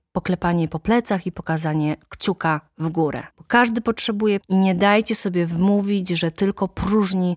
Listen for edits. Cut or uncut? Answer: cut